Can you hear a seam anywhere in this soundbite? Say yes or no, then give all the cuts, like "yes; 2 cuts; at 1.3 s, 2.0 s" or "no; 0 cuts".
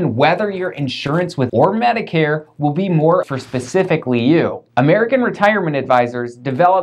yes; 3 cuts; at 1.5 s, 3.2 s, 4.7 s